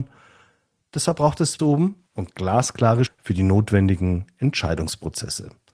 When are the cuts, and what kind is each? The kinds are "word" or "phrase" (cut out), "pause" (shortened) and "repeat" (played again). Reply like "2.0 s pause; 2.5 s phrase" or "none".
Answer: 1.6 s phrase; 2.1 s pause; 3.1 s word